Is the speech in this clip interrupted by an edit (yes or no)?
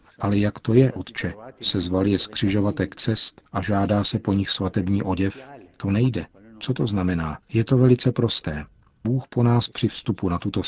yes